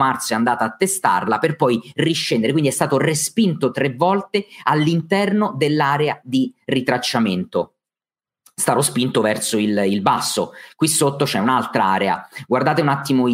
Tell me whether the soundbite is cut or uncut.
uncut